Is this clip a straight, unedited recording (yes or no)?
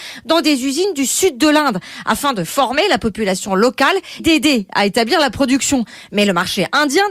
no